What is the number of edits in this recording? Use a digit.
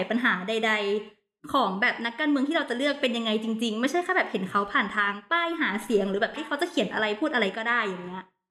1